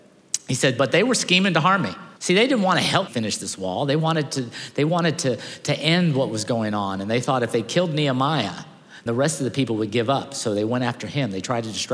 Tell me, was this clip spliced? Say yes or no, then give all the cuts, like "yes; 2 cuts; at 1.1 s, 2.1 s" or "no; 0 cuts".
yes; 3 cuts; at 2.2 s, 3.1 s, 9.1 s